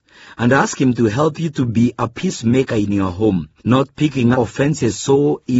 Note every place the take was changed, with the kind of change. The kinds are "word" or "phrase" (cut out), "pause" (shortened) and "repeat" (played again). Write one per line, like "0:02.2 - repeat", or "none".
0:03.6 - pause
0:04.3 - word

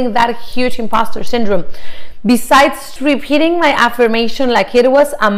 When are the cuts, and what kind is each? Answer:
0:03.0 - word

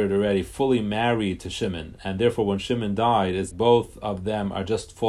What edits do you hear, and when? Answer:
0:03.5 - word

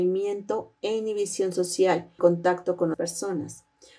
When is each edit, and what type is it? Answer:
0:02.2 - phrase
0:02.9 - word

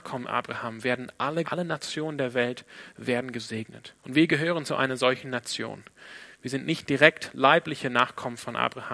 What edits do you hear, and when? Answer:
0:01.4 - word
0:04.0 - pause

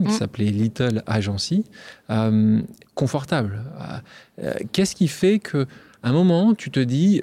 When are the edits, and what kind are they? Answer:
0:02.8 - phrase

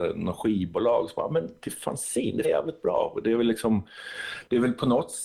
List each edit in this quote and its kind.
0:02.4 - word

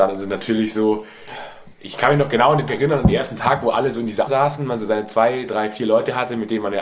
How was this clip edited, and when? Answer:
0:02.7 - word
0:04.3 - word

